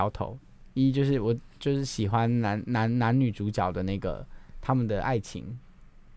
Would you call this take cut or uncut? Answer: uncut